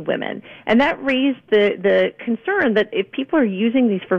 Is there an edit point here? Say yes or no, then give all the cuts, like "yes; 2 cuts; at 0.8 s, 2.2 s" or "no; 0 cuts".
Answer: no; 0 cuts